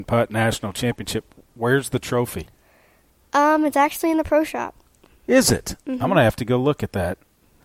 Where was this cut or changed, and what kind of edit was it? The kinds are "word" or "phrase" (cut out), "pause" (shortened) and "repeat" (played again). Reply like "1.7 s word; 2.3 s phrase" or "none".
none